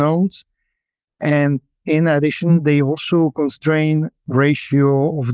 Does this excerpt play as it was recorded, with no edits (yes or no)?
yes